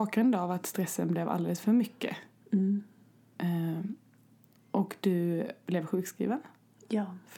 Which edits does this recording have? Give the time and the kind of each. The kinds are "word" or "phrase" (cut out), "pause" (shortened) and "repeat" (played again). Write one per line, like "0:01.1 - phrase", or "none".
none

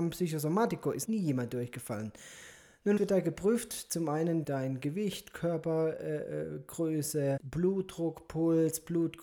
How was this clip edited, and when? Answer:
0:01.0 - word
0:03.0 - word
0:04.4 - word
0:07.4 - word

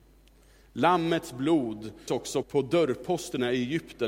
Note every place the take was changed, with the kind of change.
0:02.1 - word
0:02.4 - word

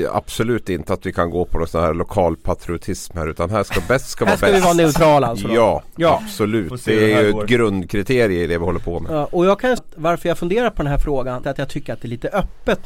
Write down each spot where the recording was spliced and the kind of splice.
0:09.8 - word
0:11.4 - phrase

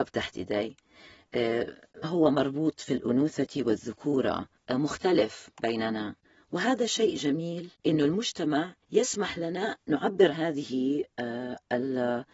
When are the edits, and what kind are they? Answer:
0:02.0 - word
0:04.6 - pause
0:06.2 - pause
0:07.7 - pause
0:08.8 - pause
0:09.8 - word
0:10.3 - word

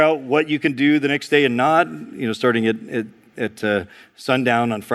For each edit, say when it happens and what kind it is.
none

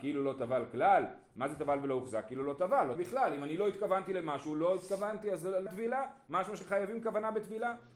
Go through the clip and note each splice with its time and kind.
0:03.0 - word
0:05.7 - word

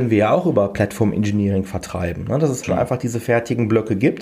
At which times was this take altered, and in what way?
0:02.6 - word

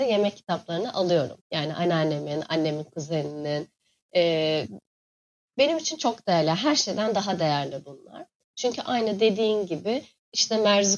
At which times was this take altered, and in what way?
none

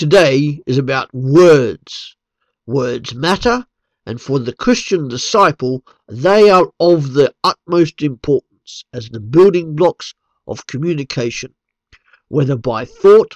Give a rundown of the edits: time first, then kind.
none

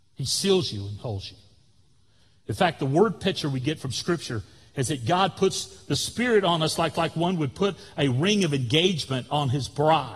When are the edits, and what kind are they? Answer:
0:06.9 - repeat

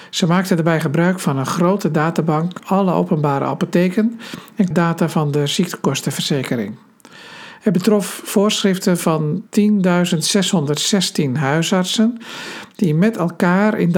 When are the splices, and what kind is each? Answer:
0:02.6 - word
0:04.7 - phrase
0:09.5 - pause

